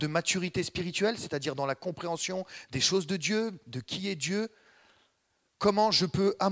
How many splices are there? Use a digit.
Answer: 0